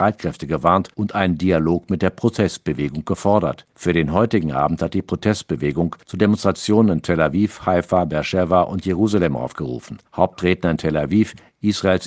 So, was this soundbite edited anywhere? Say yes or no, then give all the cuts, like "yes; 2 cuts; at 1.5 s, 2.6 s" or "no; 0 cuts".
yes; 4 cuts; at 0.9 s, 3.7 s, 6.0 s, 10.1 s